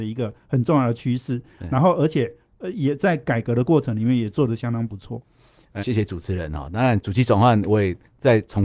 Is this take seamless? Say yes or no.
no